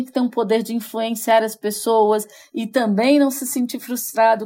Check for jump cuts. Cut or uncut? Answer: uncut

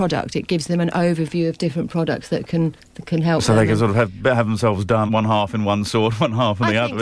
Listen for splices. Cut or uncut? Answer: cut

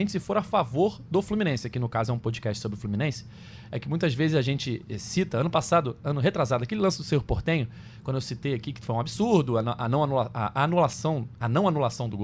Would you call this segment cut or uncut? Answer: uncut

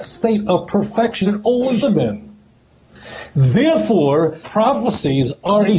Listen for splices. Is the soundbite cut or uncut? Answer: cut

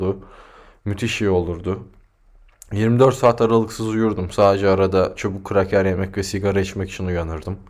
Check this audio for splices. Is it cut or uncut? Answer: uncut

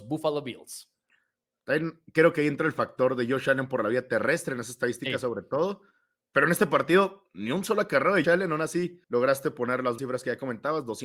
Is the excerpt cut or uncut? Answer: cut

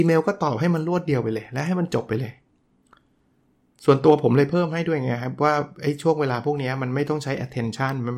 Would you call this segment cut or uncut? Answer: uncut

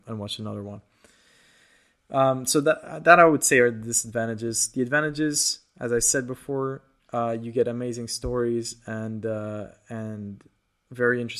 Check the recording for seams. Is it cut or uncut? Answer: uncut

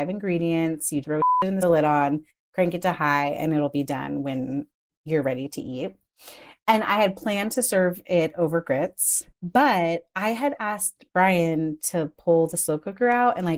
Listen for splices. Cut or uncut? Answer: cut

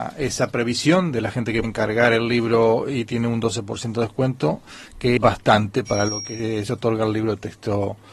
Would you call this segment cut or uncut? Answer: cut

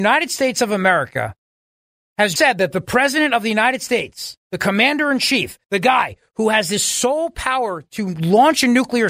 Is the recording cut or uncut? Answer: cut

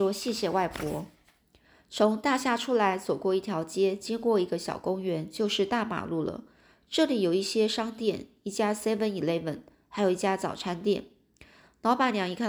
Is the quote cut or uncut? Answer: uncut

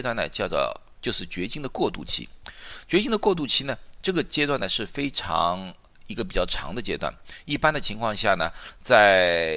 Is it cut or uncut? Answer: cut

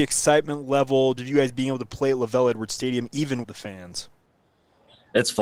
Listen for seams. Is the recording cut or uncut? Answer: cut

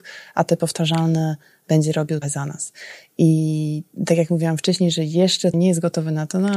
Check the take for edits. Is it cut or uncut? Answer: cut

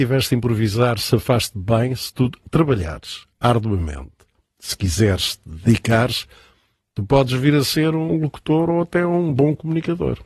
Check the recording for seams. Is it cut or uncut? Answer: uncut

